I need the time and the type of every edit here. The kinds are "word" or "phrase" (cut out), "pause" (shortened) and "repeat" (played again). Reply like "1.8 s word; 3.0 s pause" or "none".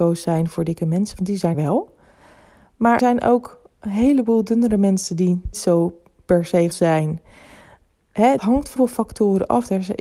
1.5 s word; 3.0 s word; 5.5 s word; 6.7 s word; 8.4 s word; 8.8 s word